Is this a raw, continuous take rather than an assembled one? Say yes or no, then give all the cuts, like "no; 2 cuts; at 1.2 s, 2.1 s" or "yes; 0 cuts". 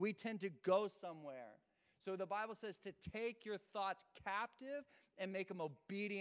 yes; 0 cuts